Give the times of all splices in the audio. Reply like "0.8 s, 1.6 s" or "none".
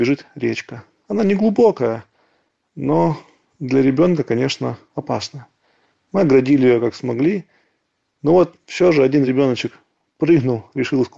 none